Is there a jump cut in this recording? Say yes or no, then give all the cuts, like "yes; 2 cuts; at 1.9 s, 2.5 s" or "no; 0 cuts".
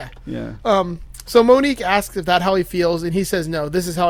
no; 0 cuts